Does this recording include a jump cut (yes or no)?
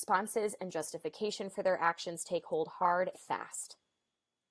yes